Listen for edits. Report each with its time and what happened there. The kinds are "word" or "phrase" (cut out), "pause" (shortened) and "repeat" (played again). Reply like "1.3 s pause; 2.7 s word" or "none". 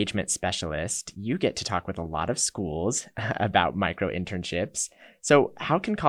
none